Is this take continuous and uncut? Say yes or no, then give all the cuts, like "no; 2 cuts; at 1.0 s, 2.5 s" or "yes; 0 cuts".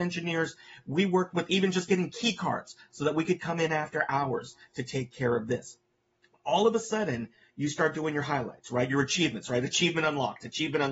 yes; 0 cuts